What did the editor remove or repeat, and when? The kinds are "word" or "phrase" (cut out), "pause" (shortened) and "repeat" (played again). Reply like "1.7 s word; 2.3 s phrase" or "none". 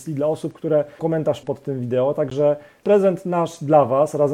1.0 s word; 1.4 s word; 2.8 s phrase

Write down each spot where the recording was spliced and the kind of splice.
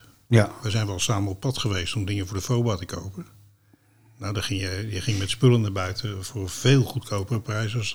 none

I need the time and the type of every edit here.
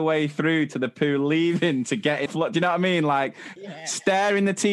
2.3 s phrase; 3.6 s word

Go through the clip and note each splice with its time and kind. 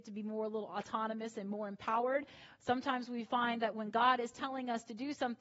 none

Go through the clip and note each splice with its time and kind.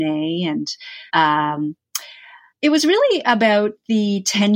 1.1 s pause

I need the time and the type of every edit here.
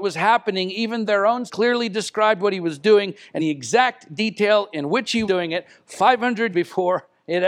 1.1 s word; 1.5 s word; 3.4 s word; 5.3 s word; 6.5 s word

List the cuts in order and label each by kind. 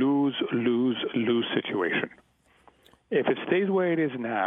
none

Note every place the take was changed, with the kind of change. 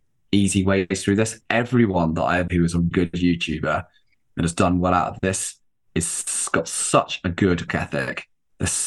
2.5 s word; 2.9 s word; 7.7 s word

